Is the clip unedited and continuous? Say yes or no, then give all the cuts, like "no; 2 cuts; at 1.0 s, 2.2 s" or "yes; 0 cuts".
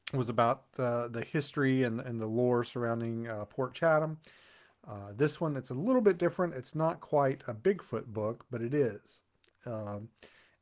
yes; 0 cuts